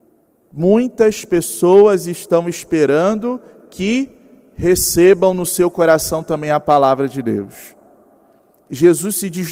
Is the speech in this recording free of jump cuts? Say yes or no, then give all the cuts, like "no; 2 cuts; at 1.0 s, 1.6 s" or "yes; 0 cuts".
yes; 0 cuts